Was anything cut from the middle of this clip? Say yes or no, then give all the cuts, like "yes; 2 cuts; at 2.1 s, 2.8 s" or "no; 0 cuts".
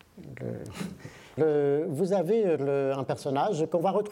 yes; 1 cut; at 1.4 s